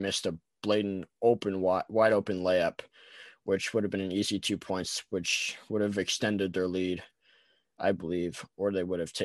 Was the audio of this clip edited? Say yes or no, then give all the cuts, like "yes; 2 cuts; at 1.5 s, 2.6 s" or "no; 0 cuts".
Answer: no; 0 cuts